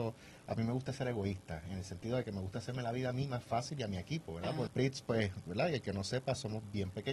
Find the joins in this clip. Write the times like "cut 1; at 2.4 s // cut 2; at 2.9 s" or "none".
cut 1; at 4.7 s // cut 2; at 5.5 s